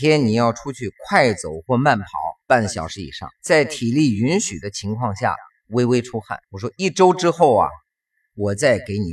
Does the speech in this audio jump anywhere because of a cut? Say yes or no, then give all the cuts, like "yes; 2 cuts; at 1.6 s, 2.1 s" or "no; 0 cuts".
yes; 3 cuts; at 2.4 s, 3.4 s, 6.4 s